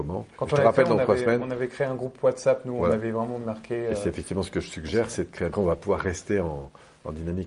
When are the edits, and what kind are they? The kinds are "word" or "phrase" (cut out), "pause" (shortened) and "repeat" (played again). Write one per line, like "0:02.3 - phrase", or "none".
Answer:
0:05.5 - phrase